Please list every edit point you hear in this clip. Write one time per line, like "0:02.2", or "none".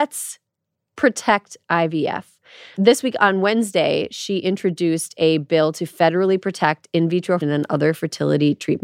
0:07.4